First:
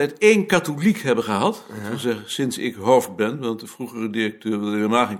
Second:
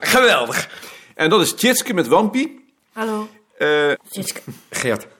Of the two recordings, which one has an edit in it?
second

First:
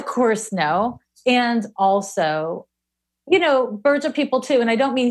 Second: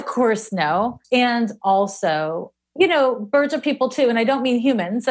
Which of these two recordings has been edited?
second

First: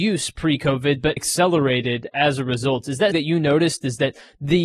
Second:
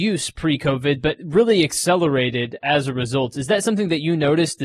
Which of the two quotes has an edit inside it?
first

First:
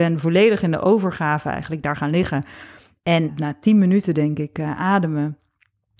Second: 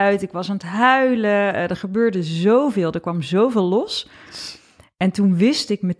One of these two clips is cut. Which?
first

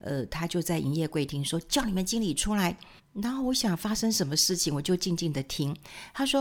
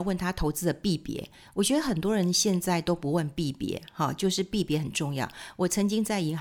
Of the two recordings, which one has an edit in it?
first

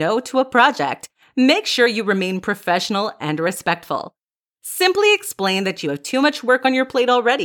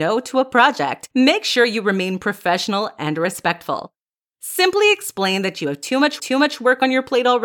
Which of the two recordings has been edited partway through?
second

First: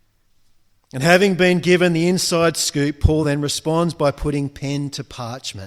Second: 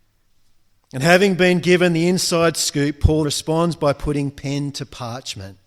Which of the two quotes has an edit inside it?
second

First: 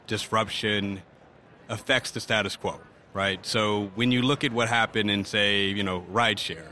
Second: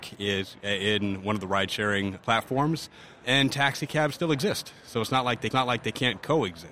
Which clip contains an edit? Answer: second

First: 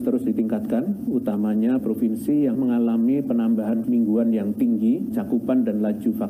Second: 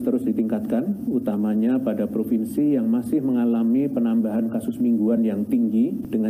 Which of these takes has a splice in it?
first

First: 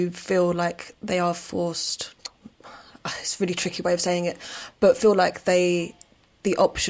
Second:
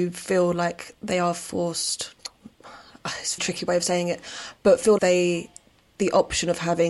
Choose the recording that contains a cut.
second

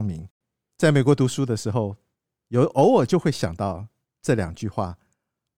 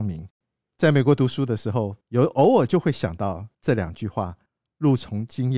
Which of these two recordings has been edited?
second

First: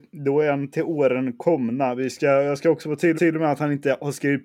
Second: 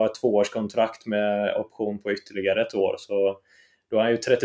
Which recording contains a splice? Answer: first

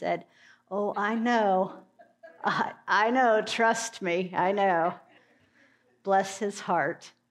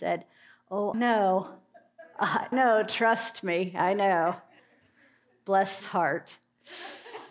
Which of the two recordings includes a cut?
second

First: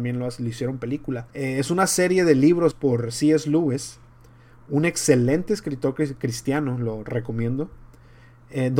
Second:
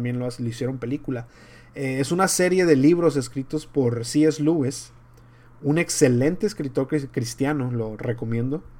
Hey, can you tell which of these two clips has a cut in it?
first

